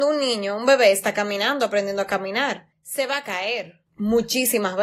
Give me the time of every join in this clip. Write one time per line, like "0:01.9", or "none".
0:02.7
0:03.9